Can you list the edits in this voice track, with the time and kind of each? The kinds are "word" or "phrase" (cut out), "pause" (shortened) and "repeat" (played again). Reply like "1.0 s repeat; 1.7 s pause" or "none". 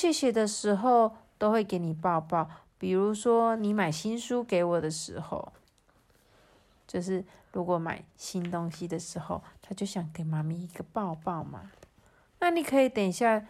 8.1 s pause